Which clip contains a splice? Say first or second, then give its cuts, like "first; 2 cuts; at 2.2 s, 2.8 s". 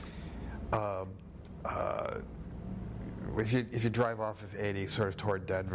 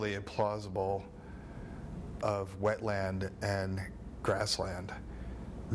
second; 1 cut; at 2.2 s